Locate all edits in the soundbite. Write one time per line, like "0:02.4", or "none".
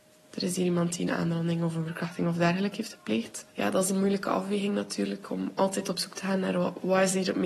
0:03.5